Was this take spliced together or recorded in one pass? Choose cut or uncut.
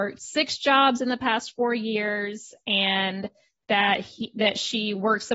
uncut